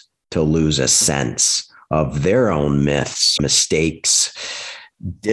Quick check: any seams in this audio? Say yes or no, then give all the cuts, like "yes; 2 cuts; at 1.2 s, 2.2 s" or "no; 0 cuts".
yes; 1 cut; at 3.4 s